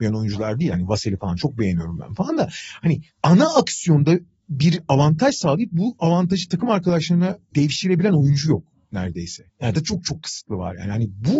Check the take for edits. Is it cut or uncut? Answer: cut